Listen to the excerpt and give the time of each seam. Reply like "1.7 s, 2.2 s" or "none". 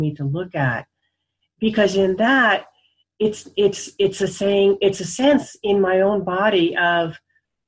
none